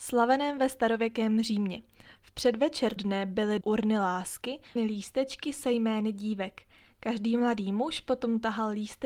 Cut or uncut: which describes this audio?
cut